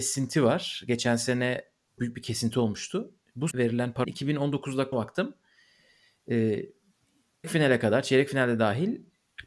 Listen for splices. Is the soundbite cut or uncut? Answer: cut